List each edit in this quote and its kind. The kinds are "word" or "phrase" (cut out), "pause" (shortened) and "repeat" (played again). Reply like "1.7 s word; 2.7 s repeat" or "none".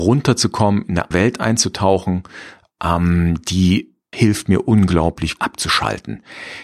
1.1 s word; 4.1 s word; 5.4 s word